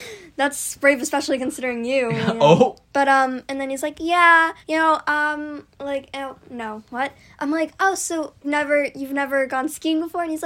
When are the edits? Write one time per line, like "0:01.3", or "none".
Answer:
0:02.8
0:04.6
0:05.7
0:08.4